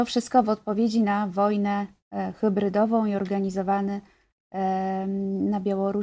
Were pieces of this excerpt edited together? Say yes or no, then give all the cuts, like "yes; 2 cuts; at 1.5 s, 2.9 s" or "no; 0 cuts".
no; 0 cuts